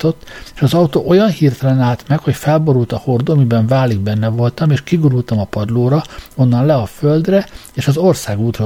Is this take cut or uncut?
uncut